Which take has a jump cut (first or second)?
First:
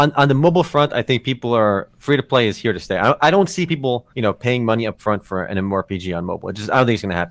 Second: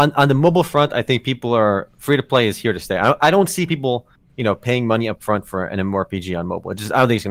first